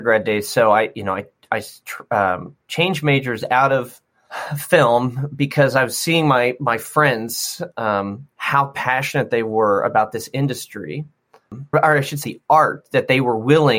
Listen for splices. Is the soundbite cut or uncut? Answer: cut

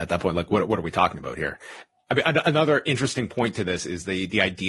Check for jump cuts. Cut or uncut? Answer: uncut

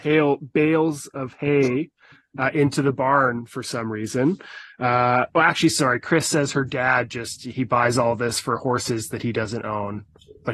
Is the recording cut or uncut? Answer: uncut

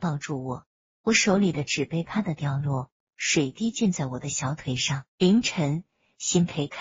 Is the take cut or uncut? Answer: cut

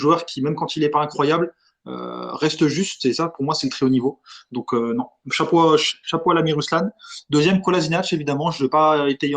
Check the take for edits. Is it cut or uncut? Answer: uncut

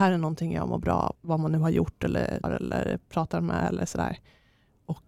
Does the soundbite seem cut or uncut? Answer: cut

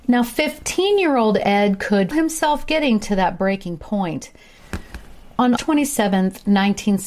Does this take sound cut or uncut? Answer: cut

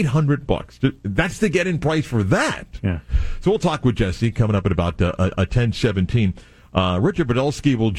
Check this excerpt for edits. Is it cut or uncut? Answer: uncut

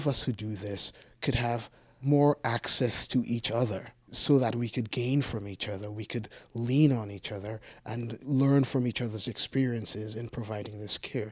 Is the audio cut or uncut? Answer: uncut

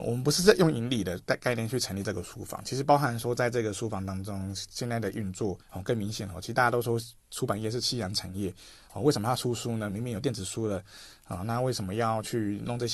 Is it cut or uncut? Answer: cut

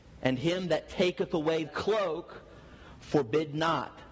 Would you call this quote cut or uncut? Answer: cut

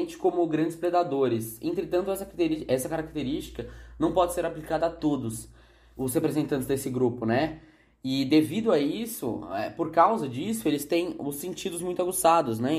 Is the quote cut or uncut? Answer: uncut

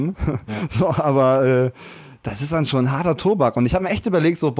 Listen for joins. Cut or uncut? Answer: uncut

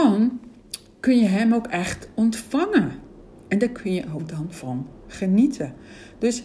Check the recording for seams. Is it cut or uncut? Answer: uncut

